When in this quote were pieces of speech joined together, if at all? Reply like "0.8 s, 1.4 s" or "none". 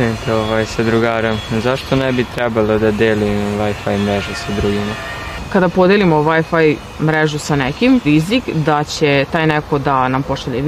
8.0 s

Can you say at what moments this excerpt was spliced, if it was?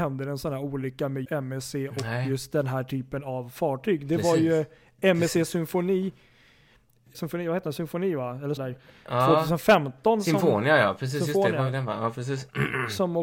1.2 s, 7.1 s, 8.6 s

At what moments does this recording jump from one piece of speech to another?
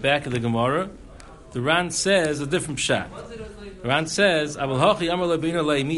none

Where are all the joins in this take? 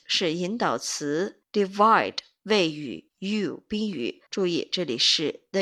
1.4 s, 3.1 s, 4.3 s

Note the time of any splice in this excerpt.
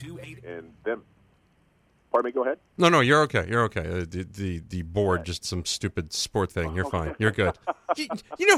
5.4 s, 6.5 s

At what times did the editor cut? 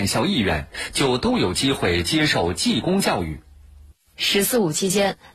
3.5 s

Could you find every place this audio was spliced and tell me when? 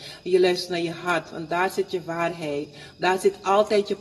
none

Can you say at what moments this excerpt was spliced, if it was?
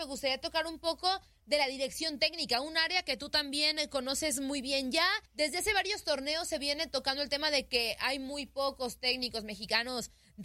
5.3 s

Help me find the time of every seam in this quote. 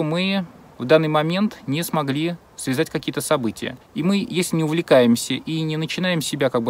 3.8 s

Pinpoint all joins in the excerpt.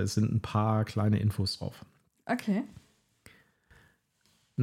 none

